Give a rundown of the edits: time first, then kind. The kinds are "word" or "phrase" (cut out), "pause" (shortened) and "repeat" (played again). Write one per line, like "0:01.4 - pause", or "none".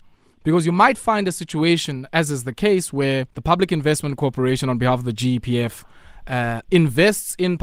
0:03.3 - pause